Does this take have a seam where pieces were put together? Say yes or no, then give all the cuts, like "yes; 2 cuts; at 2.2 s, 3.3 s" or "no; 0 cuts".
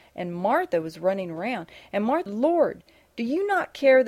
yes; 1 cut; at 2.3 s